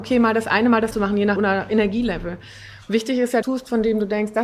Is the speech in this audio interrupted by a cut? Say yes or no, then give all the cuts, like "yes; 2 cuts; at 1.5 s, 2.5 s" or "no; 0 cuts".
yes; 4 cuts; at 0.9 s, 1.4 s, 2.8 s, 3.4 s